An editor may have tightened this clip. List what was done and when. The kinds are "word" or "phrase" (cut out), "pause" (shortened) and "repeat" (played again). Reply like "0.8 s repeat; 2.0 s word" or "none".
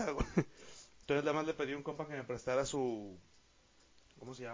none